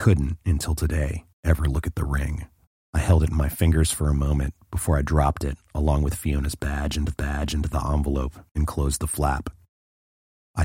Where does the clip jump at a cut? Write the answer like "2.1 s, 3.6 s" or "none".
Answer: 1.3 s, 2.7 s, 7.1 s, 8.5 s